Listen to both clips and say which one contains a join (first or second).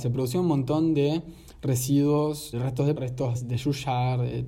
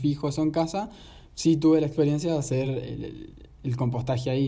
first